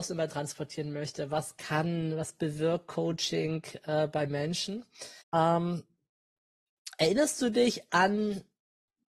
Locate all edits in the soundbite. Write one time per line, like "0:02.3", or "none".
0:05.2